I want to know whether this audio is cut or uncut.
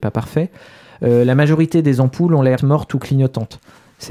cut